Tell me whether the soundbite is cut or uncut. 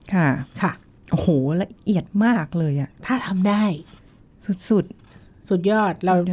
uncut